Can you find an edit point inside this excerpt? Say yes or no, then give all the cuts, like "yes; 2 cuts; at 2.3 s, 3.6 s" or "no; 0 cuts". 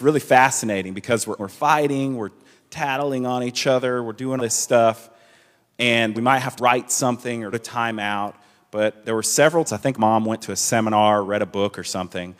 yes; 7 cuts; at 1.4 s, 4.4 s, 6.1 s, 6.6 s, 7.5 s, 9.7 s, 10.0 s